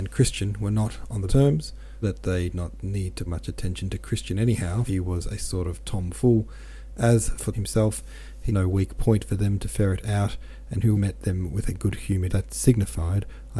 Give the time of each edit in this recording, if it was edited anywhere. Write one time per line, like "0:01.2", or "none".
0:01.3
0:02.0
0:02.5
0:03.3
0:04.9
0:07.5
0:08.5
0:10.9
0:12.3